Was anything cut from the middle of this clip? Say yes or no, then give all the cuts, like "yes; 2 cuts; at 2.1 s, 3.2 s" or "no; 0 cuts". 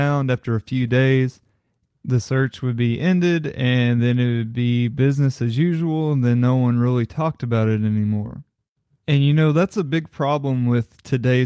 no; 0 cuts